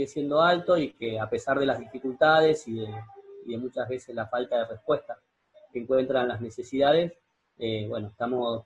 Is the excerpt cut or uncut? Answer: uncut